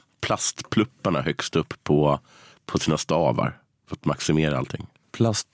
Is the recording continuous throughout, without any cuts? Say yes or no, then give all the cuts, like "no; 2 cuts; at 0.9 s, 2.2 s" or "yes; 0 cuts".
yes; 0 cuts